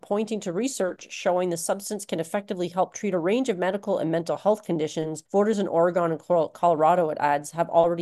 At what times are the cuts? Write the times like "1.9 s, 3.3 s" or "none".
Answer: 5.2 s